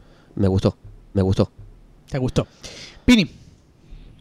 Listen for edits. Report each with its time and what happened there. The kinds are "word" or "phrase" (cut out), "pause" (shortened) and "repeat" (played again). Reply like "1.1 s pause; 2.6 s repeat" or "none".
1.1 s repeat